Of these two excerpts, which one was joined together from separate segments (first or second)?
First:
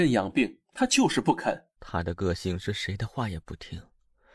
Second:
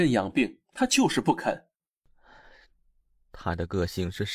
first